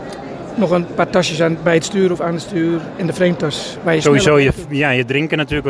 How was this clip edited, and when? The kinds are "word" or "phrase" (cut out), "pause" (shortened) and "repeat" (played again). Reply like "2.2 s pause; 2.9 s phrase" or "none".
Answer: none